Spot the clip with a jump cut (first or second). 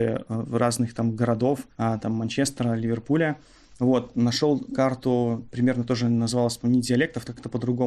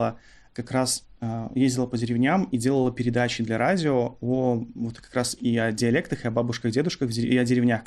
first